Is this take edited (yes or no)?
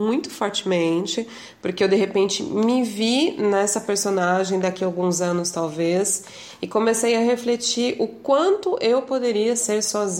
no